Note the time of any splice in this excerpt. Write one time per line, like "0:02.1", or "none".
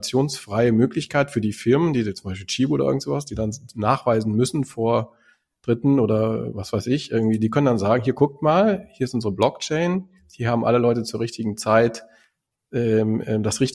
none